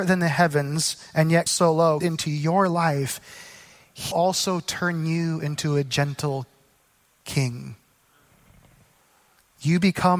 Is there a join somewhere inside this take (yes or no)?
yes